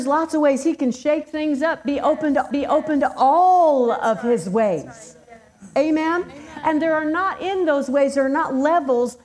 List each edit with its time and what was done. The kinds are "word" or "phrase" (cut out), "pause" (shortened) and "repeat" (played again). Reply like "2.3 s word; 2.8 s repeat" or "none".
2.5 s repeat